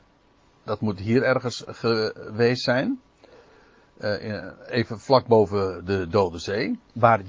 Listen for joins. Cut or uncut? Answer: uncut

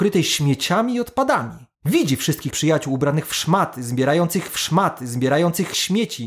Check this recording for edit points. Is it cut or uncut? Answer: cut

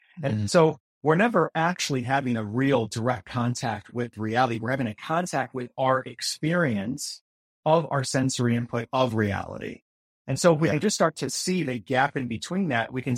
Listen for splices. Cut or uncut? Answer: uncut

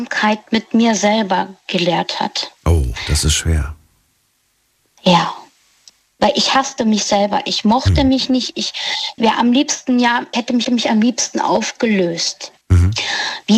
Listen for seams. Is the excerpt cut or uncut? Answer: cut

